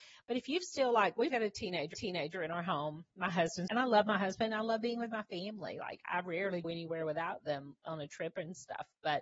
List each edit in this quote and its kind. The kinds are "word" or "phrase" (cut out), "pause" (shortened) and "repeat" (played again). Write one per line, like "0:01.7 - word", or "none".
0:01.3 - word
0:01.9 - repeat
0:03.7 - word
0:06.6 - word